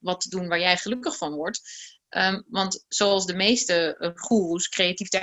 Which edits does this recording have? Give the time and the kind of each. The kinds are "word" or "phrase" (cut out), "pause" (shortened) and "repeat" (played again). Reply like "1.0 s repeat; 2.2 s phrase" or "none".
none